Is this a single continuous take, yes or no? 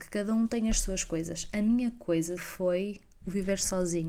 no